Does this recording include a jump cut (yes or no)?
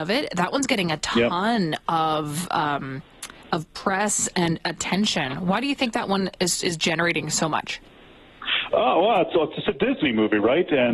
no